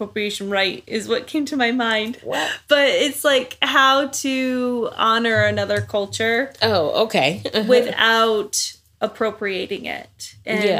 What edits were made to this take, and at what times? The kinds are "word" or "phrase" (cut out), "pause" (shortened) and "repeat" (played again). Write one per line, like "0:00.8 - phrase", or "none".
none